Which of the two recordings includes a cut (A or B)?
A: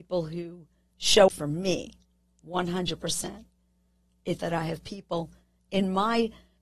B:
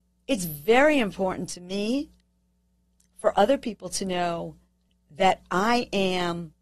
A